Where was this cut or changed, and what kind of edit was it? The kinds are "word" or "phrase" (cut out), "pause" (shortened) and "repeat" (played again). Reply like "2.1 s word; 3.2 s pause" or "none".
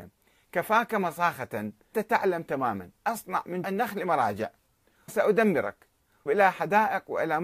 1.9 s word; 3.0 s word; 3.6 s word; 5.1 s word; 6.3 s word